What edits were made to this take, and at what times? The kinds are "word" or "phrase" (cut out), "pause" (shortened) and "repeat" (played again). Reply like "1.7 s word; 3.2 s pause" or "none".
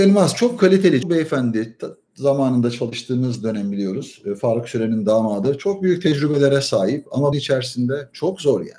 1.0 s word; 7.3 s phrase